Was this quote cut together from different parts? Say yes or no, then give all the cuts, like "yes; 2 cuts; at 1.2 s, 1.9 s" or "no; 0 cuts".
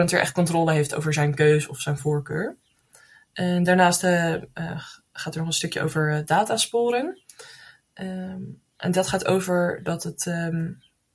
no; 0 cuts